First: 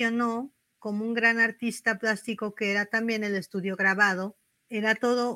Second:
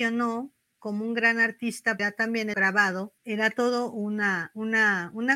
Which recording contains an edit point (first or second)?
second